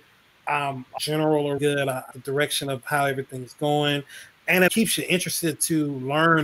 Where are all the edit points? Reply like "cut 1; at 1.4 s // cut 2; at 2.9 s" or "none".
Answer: cut 1; at 1.0 s // cut 2; at 1.6 s // cut 3; at 2.1 s // cut 4; at 4.7 s